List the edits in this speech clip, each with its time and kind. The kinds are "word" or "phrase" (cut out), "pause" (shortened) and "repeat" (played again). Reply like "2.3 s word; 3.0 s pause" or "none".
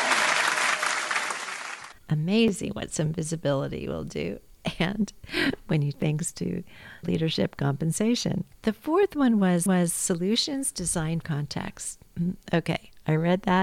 2.0 s pause; 5.9 s word; 7.0 s word; 8.5 s pause; 9.7 s repeat; 11.2 s word